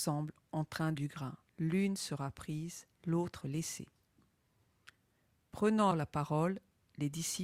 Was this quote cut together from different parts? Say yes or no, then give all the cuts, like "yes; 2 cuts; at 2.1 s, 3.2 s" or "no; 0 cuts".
yes; 4 cuts; at 0.9 s, 1.5 s, 2.9 s, 5.9 s